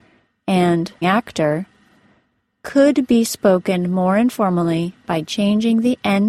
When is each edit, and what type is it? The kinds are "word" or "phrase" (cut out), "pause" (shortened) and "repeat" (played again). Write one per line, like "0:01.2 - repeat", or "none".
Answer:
0:01.0 - word